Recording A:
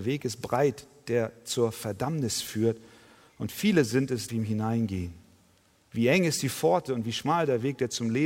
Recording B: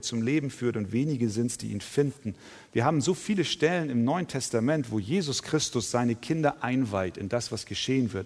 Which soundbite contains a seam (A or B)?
A